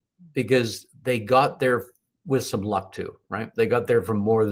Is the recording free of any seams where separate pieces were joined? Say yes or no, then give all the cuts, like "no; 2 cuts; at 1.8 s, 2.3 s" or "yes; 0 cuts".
yes; 0 cuts